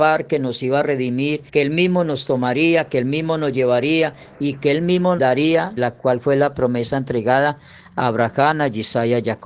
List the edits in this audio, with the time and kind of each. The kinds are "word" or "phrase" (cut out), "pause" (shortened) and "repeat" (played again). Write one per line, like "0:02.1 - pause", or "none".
0:01.5 - pause
0:05.2 - word
0:05.8 - phrase